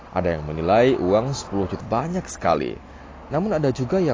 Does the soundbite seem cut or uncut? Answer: cut